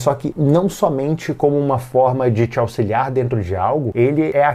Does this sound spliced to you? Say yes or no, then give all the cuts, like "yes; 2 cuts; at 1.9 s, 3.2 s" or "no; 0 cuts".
no; 0 cuts